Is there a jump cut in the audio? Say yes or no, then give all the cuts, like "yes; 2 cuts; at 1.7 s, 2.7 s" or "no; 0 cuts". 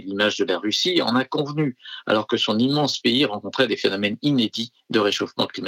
no; 0 cuts